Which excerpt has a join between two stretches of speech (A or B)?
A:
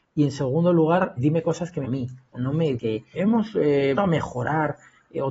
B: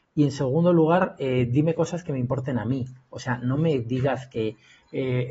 A